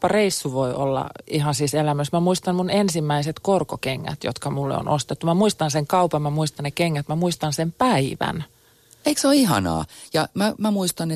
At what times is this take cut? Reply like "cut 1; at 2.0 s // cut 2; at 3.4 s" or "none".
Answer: none